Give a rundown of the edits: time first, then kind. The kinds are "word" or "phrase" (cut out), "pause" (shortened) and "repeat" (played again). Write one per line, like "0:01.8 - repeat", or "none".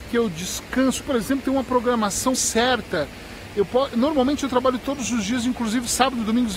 0:01.0 - word
0:02.3 - word
0:03.9 - word